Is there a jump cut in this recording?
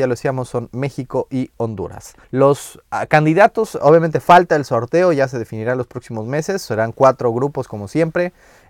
yes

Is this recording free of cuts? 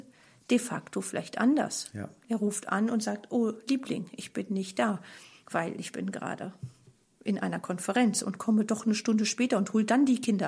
yes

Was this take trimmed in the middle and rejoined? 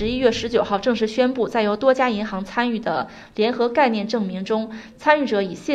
no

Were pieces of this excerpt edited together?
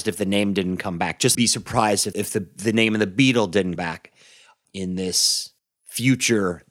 yes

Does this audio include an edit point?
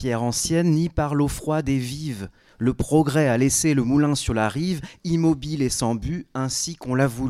no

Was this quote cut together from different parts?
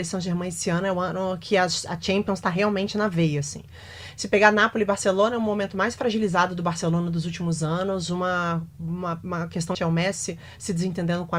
yes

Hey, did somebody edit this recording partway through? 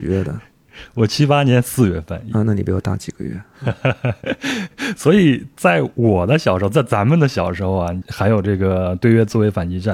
yes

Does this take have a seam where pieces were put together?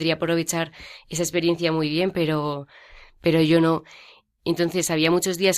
no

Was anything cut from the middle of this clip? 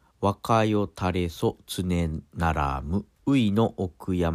yes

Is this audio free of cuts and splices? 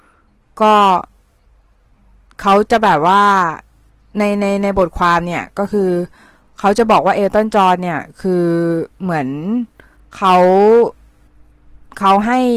no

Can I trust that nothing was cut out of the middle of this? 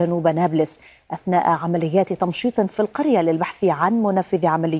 yes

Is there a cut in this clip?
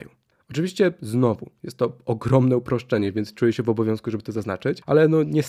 no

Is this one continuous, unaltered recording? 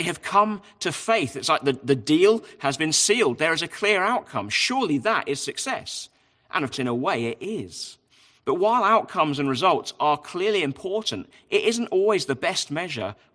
no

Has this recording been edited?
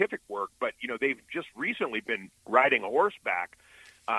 yes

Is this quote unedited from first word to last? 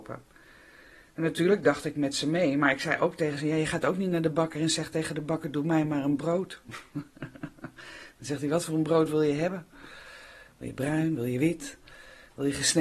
yes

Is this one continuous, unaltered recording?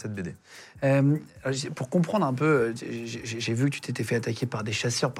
yes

